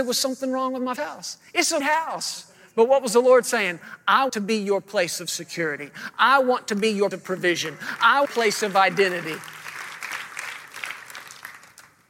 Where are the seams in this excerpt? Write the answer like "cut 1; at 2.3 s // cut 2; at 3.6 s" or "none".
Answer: cut 1; at 1.0 s // cut 2; at 1.8 s // cut 3; at 4.3 s // cut 4; at 7.1 s // cut 5; at 8.2 s